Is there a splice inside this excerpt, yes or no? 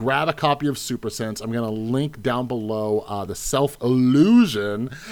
no